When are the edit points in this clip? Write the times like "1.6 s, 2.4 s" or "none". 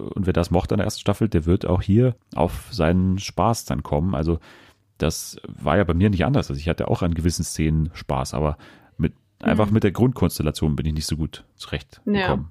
2.2 s